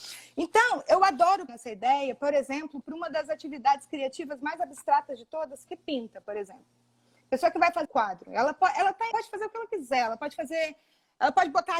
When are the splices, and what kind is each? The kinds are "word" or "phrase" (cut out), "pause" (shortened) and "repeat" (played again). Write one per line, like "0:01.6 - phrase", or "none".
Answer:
0:01.5 - word
0:05.7 - phrase
0:07.8 - word
0:09.1 - word